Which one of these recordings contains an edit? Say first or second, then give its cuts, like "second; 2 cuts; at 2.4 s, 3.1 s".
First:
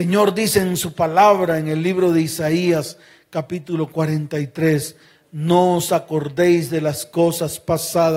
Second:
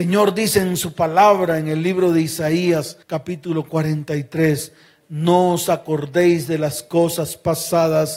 second; 1 cut; at 3.0 s